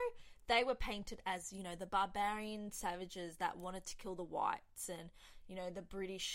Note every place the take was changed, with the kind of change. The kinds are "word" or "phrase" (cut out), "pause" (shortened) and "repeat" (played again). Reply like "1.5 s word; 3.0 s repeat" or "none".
none